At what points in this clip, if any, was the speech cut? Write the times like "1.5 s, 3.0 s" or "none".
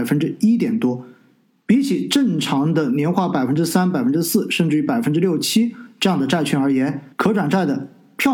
7.1 s